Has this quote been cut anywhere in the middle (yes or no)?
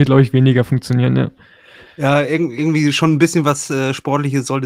no